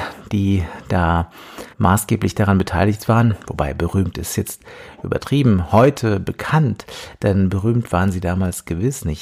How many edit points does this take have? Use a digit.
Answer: 1